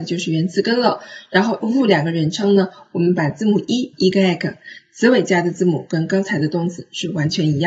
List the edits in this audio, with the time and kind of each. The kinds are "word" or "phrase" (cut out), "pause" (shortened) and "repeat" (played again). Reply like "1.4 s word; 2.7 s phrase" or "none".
1.6 s word; 3.9 s phrase